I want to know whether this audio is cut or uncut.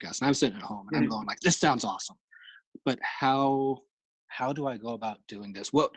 uncut